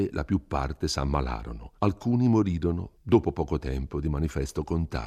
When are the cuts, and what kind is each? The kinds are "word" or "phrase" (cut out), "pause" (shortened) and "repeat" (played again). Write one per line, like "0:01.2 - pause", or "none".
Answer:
0:01.8 - pause
0:02.9 - pause